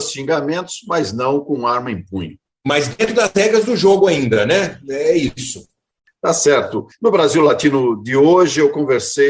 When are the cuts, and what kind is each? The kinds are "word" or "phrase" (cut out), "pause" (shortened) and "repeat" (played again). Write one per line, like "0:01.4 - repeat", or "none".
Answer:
none